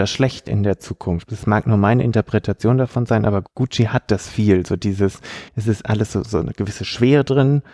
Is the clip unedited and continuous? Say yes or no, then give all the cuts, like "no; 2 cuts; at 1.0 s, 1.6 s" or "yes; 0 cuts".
no; 1 cut; at 5.5 s